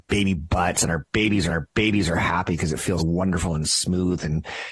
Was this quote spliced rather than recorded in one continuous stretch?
yes; 2 cuts; at 1.5 s, 3.0 s

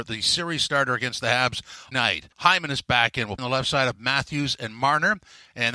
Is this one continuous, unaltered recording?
no; 3 cuts; at 1.9 s, 2.3 s, 3.4 s

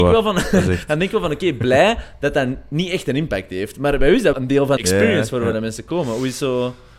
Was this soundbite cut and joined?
yes; 2 cuts; at 4.3 s, 4.8 s

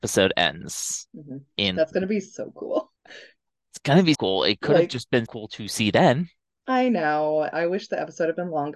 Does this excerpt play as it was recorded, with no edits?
no; 3 cuts; at 3.0 s, 4.1 s, 5.3 s

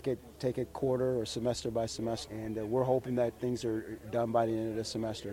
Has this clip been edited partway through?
yes; 1 cut; at 2.3 s

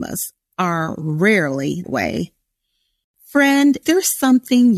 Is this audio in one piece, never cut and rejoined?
no; 2 cuts; at 1.8 s, 3.8 s

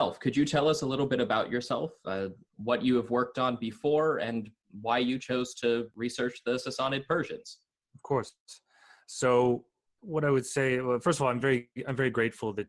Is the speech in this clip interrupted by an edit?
no; 0 cuts

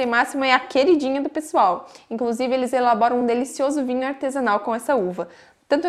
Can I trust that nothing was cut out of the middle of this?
yes; 0 cuts

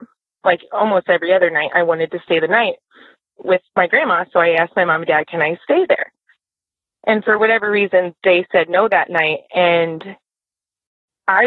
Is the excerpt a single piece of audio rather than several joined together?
no; 1 cut; at 3.7 s

